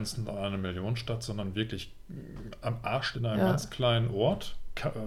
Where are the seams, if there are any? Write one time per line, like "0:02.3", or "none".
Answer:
0:03.1